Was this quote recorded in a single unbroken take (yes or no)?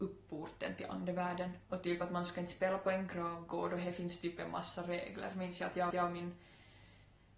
no